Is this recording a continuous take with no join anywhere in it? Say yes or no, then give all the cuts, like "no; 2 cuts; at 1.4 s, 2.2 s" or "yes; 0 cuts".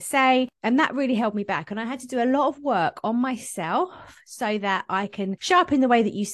yes; 0 cuts